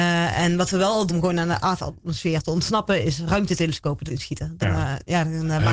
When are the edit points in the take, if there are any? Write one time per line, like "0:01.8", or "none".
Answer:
0:01.1
0:04.1
0:04.6

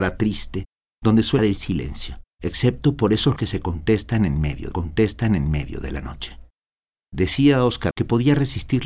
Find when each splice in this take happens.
0:01.4
0:02.3
0:03.4
0:04.7
0:06.8
0:07.9

